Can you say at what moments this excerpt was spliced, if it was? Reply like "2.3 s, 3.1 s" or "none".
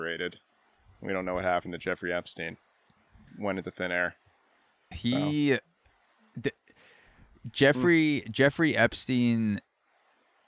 3.3 s, 4.9 s